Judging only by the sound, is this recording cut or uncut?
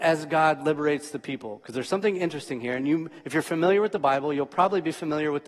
uncut